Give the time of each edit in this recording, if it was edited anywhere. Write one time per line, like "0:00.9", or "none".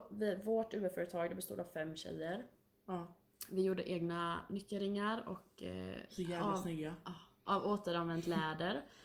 none